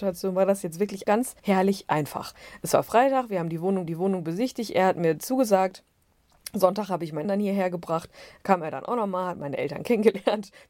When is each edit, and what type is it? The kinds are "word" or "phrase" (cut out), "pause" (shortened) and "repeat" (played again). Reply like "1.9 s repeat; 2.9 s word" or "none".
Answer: 1.0 s word; 1.4 s pause; 3.9 s repeat; 7.2 s word